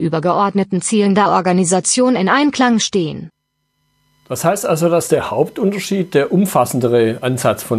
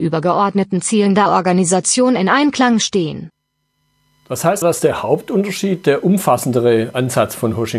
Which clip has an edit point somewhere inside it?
second; 1 cut; at 4.6 s

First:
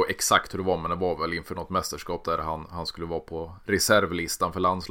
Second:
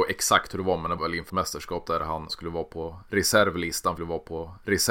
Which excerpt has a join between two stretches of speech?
second; 4 cuts; at 1.0 s, 1.3 s, 2.3 s, 4.0 s

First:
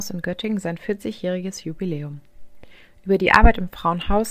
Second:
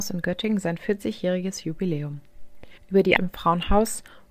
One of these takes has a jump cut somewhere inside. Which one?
second; 2 cuts; at 2.8 s, 3.2 s

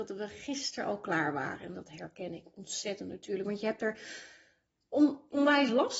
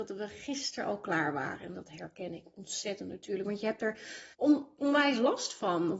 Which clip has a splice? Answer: second; 1 cut; at 4.3 s

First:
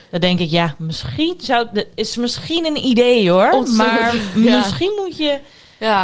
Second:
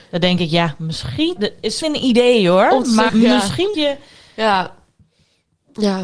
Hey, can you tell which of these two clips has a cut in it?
second; 4 cuts; at 1.4 s, 1.8 s, 3.1 s, 3.7 s

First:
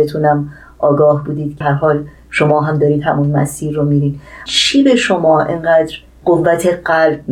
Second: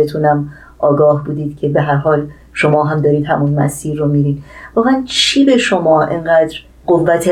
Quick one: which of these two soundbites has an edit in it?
first; 2 cuts; at 1.6 s, 4.5 s

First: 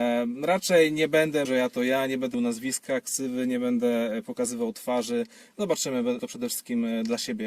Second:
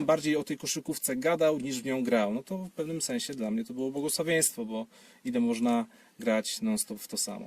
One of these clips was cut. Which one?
first; 3 cuts; at 1.5 s, 2.3 s, 6.2 s

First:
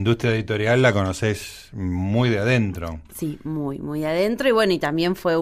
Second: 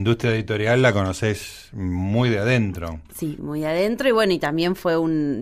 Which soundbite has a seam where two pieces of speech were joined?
second; 1 cut; at 3.4 s

